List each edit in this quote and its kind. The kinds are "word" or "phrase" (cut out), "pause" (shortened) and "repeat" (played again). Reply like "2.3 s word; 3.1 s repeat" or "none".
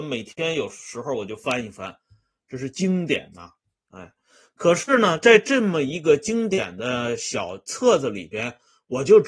none

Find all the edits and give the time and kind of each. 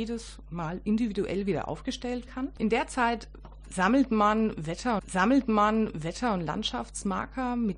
2.3 s word; 5.0 s repeat

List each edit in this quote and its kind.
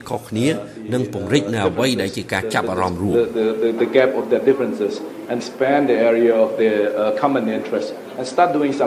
5.4 s word

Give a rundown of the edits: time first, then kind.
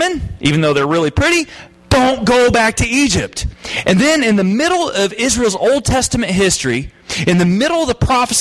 none

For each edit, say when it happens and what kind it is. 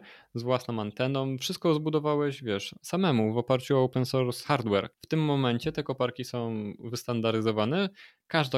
4.9 s pause

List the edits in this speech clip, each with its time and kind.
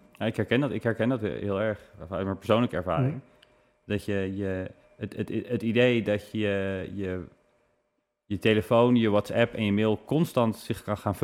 none

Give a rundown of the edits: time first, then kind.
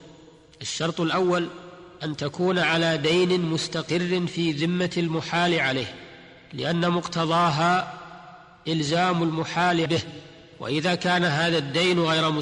9.9 s phrase

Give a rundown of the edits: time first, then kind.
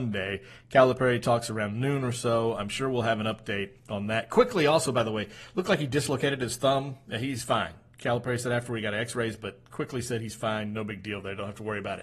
none

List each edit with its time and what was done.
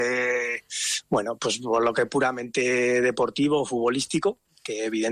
none

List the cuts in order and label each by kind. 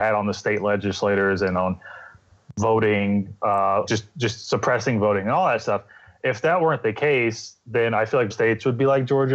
3.9 s word; 8.3 s word

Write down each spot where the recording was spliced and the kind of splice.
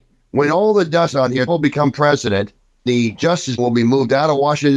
1.1 s word; 1.5 s word; 2.9 s word; 3.6 s word

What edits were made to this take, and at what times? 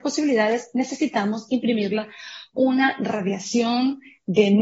2.5 s word

